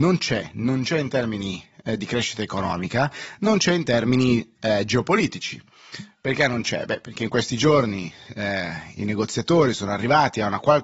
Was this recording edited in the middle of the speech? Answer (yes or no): no